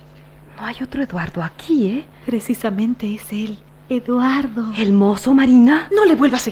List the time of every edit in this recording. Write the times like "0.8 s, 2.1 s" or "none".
3.7 s